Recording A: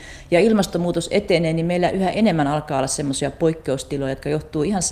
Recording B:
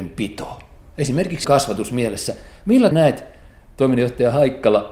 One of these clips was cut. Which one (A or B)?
B